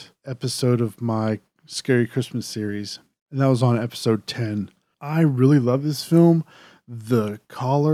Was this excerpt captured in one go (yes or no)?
yes